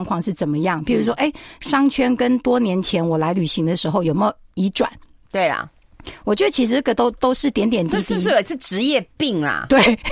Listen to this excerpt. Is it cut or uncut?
uncut